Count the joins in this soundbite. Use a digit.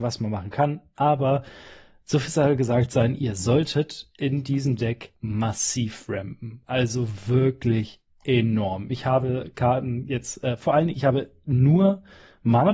1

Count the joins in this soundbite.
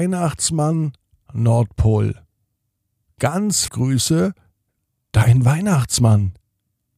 2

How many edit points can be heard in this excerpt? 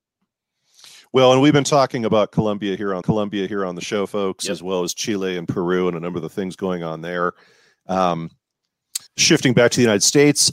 2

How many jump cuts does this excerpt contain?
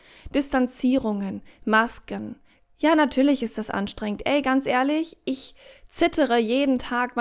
0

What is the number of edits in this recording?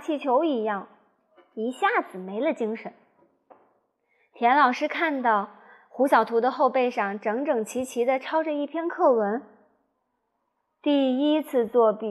0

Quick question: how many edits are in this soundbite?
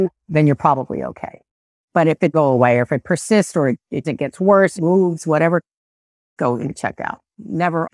5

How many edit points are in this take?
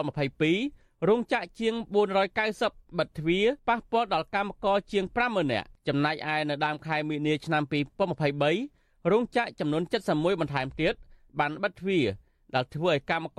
1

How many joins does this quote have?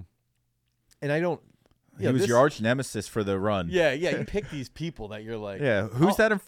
1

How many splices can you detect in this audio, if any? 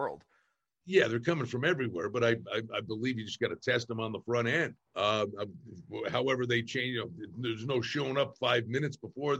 1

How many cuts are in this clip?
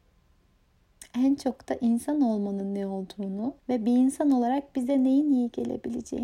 1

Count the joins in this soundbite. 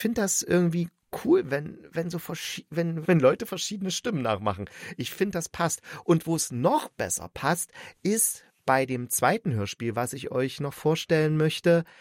1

